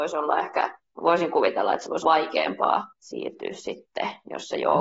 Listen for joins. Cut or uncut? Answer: cut